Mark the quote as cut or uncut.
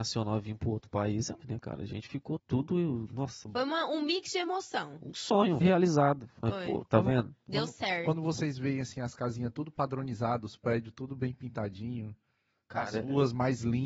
cut